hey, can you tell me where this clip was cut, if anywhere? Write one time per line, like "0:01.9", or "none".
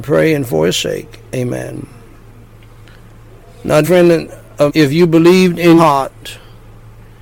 0:01.3
0:03.8
0:04.7
0:05.8